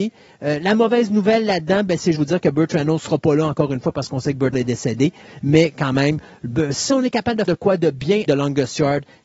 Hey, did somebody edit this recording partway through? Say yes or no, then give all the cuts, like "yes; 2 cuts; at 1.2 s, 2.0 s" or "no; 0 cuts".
yes; 4 cuts; at 2.1 s, 4.5 s, 7.5 s, 8.3 s